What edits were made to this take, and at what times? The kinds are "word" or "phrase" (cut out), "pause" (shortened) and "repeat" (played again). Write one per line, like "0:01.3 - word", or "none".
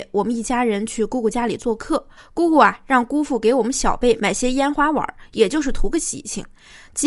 0:02.2 - pause